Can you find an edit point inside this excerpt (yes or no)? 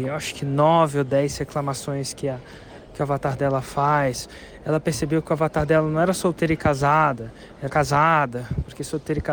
yes